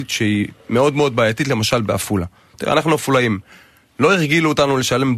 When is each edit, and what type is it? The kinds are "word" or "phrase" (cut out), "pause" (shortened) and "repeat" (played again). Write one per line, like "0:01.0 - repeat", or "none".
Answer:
none